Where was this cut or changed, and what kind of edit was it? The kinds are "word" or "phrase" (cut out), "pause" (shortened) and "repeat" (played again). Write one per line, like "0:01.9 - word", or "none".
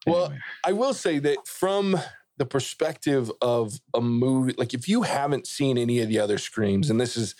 0:01.4 - word